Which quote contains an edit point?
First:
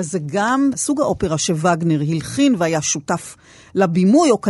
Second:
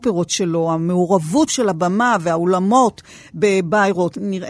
second; 1 cut; at 1.5 s

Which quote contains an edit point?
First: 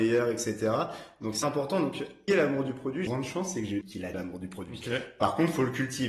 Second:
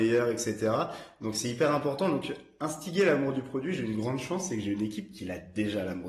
first; 5 cuts; at 1.4 s, 2.3 s, 3.1 s, 3.8 s, 4.1 s

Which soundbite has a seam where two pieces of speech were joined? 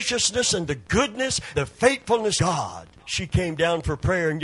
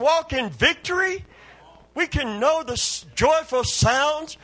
first; 3 cuts; at 1.5 s, 2.4 s, 3.0 s

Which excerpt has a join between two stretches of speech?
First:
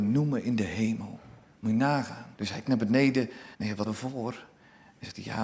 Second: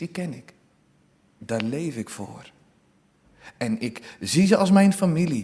first; 4 cuts; at 2.3 s, 2.7 s, 3.5 s, 3.8 s

